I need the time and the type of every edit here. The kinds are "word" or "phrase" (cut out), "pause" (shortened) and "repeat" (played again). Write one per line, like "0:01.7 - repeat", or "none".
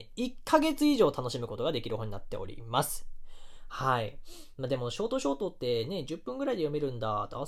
none